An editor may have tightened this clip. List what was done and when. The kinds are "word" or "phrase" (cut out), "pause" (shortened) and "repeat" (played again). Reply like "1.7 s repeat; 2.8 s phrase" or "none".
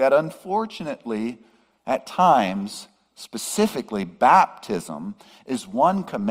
none

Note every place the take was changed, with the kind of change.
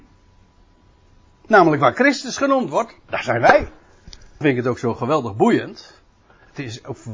4.4 s word

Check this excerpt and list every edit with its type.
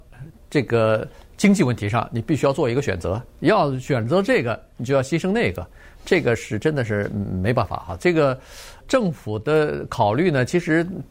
8.8 s word

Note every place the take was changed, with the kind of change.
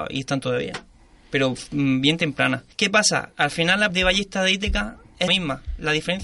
2.7 s pause; 3.3 s pause; 3.9 s word; 5.3 s phrase

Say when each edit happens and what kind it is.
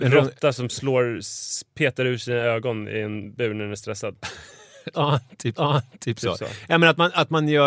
5.5 s repeat

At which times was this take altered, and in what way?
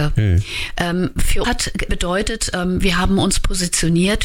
1.4 s word; 1.9 s word

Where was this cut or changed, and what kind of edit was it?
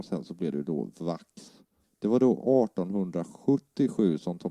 1.8 s pause

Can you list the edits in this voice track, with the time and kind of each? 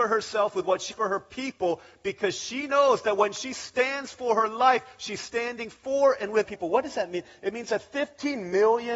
0.9 s word; 6.4 s word

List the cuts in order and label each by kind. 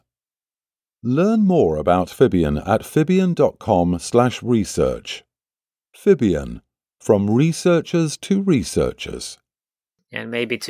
none

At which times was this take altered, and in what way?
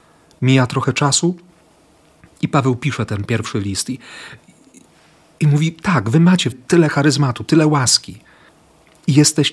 6.5 s word

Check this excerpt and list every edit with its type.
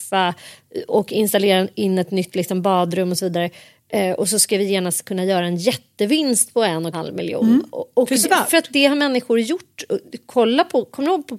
6.9 s word; 8.2 s word

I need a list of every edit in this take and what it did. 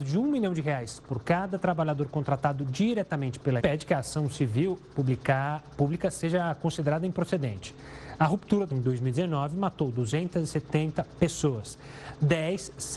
3.6 s phrase; 8.7 s word

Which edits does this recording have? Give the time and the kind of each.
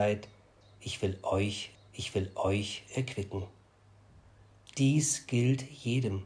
1.7 s repeat

